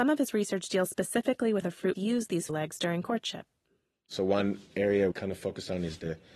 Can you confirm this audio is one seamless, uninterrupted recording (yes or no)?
no